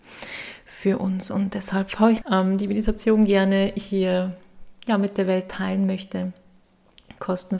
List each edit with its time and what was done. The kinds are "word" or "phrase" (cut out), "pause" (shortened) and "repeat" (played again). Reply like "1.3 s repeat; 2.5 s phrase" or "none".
2.2 s phrase